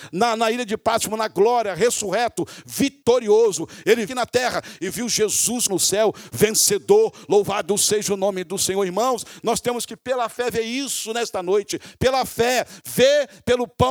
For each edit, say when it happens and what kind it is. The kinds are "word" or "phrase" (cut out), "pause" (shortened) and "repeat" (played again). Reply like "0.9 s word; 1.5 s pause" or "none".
4.1 s phrase; 5.7 s word